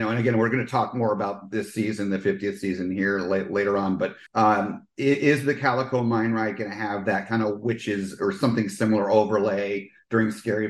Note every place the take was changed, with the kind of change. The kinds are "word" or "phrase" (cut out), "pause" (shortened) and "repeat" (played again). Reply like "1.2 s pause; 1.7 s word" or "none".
4.3 s pause